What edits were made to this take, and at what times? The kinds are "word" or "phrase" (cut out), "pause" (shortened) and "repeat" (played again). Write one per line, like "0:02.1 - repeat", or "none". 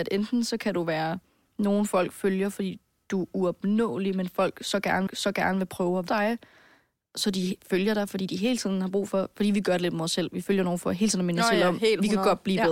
0:05.1 - repeat
0:06.1 - word